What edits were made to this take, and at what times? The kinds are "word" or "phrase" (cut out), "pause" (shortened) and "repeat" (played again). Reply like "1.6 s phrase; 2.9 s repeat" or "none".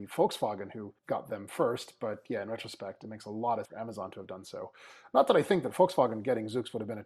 1.0 s pause; 3.6 s word

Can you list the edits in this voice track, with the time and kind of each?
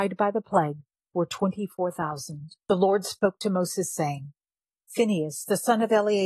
0.9 s pause; 2.6 s pause

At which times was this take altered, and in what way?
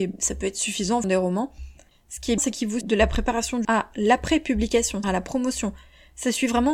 1.0 s word; 2.4 s word; 2.8 s word; 3.6 s word; 5.0 s word

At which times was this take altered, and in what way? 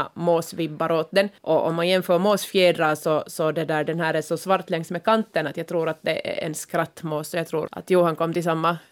1.4 s pause; 7.7 s word

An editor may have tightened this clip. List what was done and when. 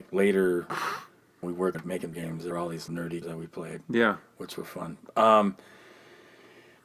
1.4 s word; 1.7 s word; 2.1 s word; 2.5 s word; 2.9 s word; 3.2 s word

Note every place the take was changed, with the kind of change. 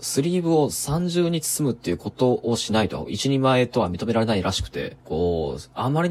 5.0 s pause

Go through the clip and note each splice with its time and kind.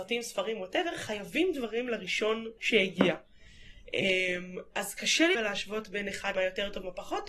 2.6 s pause; 5.0 s word; 5.3 s word; 6.3 s word

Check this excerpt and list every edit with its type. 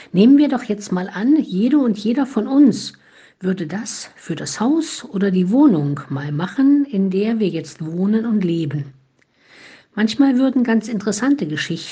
none

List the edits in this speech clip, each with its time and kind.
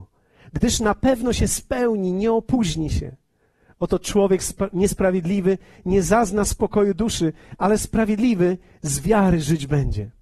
none

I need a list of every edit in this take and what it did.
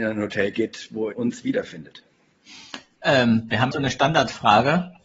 1.1 s word; 3.7 s word

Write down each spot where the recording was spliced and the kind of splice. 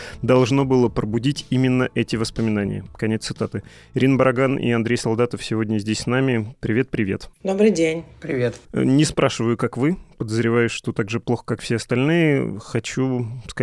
8.6 s pause

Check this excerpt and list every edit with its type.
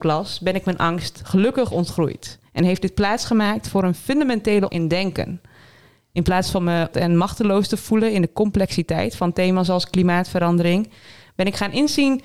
4.7 s word; 6.9 s word

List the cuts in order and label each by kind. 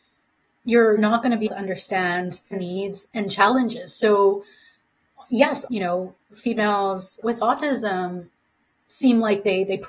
1.0 s word; 1.5 s word; 2.5 s word; 3.0 s word; 5.7 s word; 7.2 s word

